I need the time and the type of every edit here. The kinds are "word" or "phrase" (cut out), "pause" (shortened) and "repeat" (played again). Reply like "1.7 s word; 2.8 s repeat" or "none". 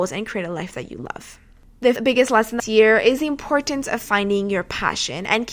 2.0 s word; 2.6 s phrase